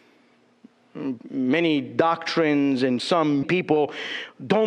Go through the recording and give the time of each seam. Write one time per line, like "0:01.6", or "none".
0:01.2
0:03.0
0:03.4